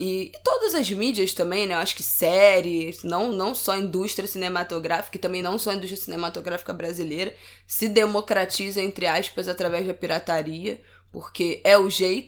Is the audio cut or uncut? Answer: uncut